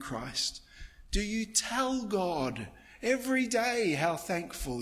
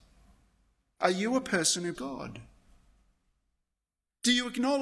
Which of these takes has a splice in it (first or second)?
second